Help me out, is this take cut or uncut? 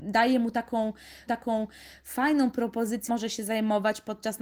cut